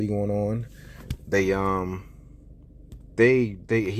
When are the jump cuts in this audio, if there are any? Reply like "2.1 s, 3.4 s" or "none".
none

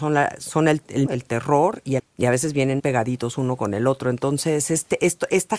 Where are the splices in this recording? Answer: 1.1 s, 2.0 s, 2.8 s

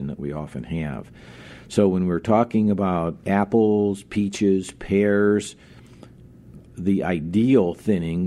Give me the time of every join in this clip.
3.2 s

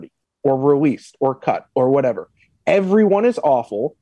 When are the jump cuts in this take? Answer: none

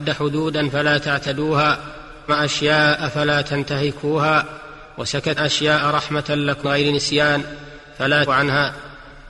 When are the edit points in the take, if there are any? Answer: 2.3 s, 5.4 s, 6.6 s, 8.3 s

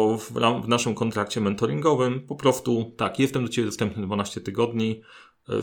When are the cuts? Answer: none

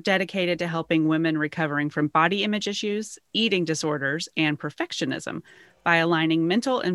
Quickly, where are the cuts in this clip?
none

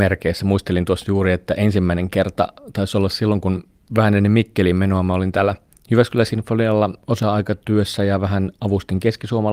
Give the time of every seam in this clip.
none

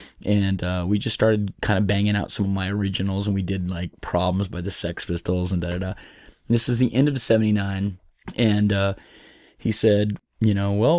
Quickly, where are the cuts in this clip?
none

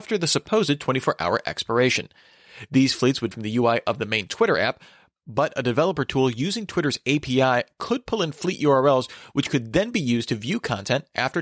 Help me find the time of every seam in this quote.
3.3 s

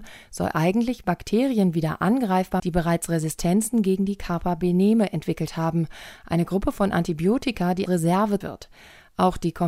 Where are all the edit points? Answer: 2.6 s, 7.9 s, 8.4 s

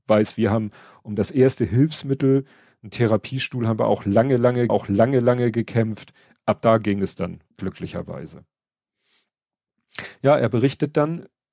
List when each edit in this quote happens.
4.7 s, 7.5 s

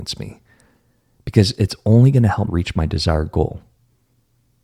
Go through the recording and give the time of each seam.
2.5 s

